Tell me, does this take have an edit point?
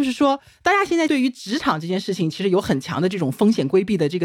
no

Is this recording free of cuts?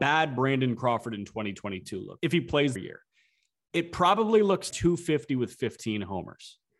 no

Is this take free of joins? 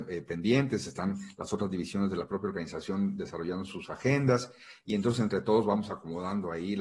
yes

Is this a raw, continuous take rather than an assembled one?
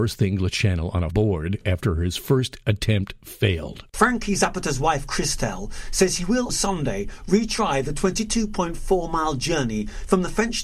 no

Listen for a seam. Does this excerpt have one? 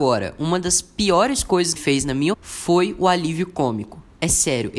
yes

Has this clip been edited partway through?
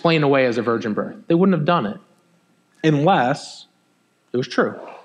no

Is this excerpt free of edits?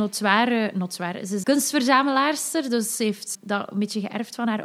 no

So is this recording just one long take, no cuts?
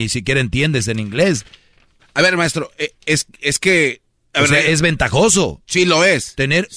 yes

